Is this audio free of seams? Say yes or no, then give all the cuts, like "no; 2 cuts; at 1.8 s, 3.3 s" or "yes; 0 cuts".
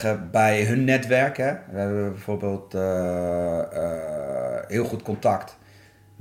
yes; 0 cuts